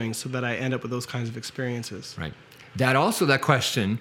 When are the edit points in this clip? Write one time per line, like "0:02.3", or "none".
none